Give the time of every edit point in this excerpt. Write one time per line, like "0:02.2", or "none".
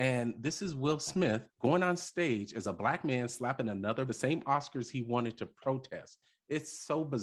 0:01.5
0:04.1